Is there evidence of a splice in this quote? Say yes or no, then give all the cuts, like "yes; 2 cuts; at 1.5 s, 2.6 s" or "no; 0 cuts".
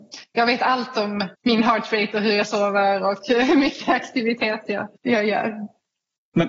yes; 2 cuts; at 1.3 s, 5.0 s